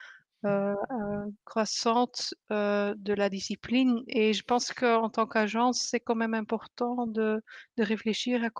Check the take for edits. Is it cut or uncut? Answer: uncut